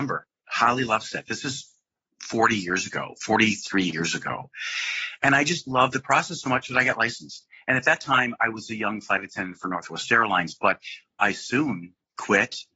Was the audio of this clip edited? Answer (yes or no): no